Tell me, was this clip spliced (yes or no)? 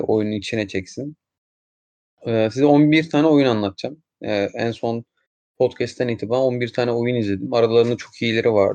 no